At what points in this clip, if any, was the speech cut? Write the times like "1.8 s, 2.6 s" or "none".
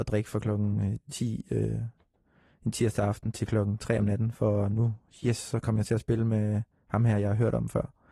none